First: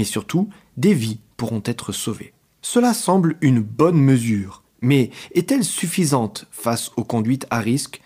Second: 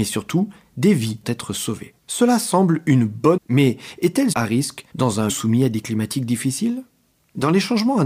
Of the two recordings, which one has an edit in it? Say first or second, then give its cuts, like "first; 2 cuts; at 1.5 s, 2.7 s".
second; 7 cuts; at 1.2 s, 2.0 s, 3.4 s, 4.3 s, 4.9 s, 5.3 s, 5.8 s